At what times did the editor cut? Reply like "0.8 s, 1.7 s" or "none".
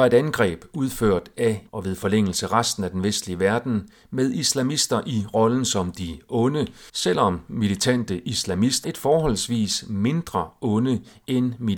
1.7 s, 6.9 s, 8.8 s